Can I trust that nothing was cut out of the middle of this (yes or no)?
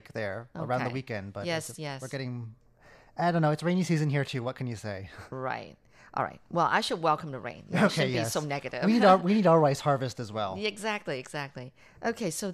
yes